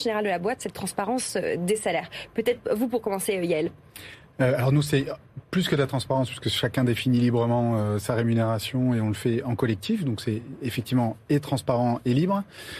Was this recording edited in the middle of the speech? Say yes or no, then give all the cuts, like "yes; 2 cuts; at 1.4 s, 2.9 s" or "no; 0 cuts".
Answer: no; 0 cuts